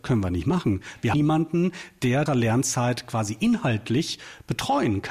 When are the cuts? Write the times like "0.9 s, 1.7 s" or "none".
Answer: 1.1 s, 2.3 s